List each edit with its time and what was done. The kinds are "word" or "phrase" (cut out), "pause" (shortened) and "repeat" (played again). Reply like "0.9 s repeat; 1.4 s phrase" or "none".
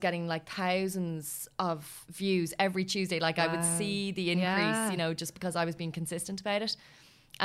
none

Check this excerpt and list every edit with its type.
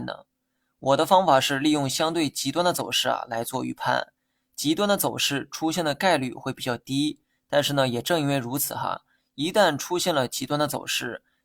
none

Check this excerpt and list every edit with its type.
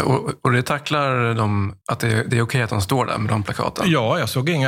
1.8 s pause

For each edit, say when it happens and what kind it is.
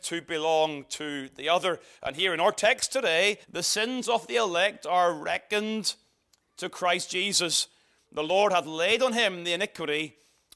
3.4 s pause

